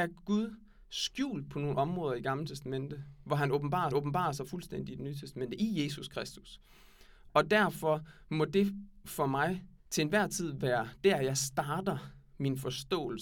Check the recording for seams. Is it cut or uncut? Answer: cut